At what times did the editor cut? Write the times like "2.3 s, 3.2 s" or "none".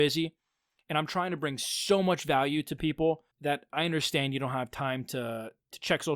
3.3 s

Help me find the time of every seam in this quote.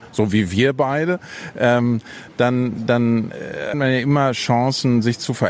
3.7 s

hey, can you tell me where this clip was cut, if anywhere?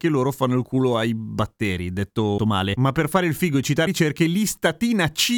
2.4 s, 3.9 s

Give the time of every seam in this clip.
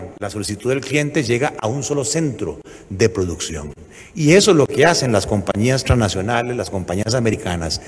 none

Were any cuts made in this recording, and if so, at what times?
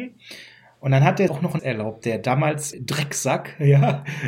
1.3 s, 1.6 s, 2.7 s

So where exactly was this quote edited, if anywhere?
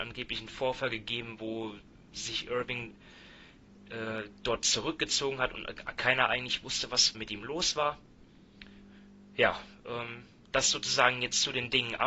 7.1 s

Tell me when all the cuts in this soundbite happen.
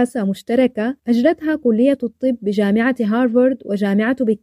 1.0 s

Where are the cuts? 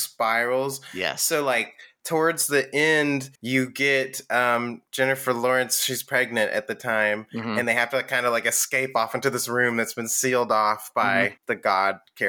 3.4 s, 4.9 s, 11.4 s

